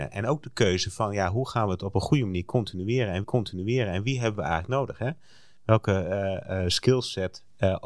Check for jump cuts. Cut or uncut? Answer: cut